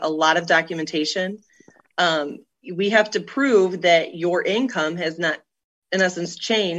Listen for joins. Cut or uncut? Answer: uncut